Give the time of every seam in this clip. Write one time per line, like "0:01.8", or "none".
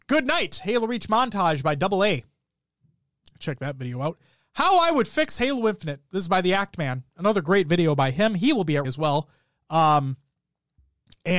0:08.8